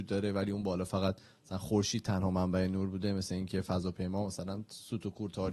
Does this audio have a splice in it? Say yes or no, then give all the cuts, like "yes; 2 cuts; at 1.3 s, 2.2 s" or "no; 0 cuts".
no; 0 cuts